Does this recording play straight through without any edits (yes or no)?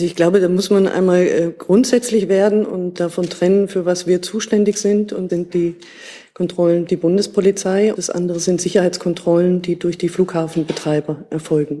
no